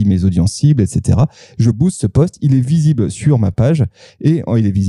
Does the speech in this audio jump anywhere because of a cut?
no; 0 cuts

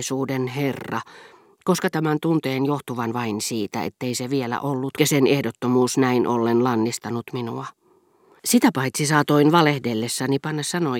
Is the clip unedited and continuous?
no; 2 cuts; at 1.9 s, 5.0 s

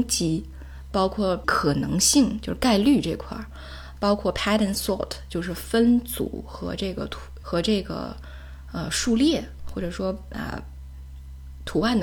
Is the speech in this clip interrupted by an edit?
yes; 3 cuts; at 1.4 s, 4.7 s, 7.4 s

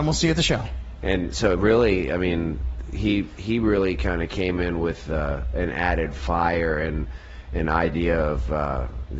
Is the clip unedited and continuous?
yes; 0 cuts

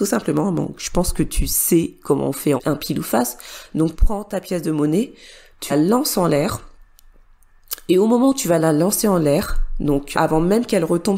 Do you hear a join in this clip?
yes; 4 cuts; at 2.6 s, 3.9 s, 5.7 s, 10.1 s

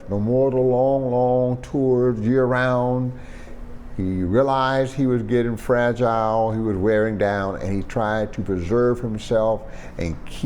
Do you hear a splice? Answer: no; 0 cuts

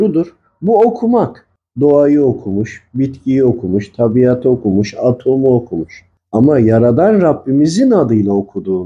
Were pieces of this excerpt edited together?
no; 0 cuts

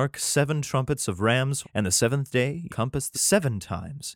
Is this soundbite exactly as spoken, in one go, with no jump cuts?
no; 3 cuts; at 1.6 s, 2.7 s, 3.1 s

